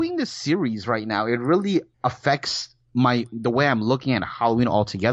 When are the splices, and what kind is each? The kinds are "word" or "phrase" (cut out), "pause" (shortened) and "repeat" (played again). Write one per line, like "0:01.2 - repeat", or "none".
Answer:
none